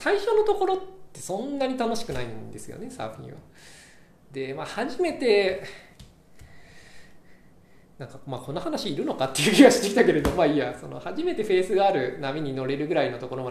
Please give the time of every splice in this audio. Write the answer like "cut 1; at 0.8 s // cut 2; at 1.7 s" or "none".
none